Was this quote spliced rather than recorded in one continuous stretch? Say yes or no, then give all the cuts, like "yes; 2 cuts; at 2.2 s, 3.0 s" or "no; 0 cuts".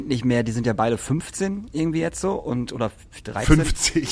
no; 0 cuts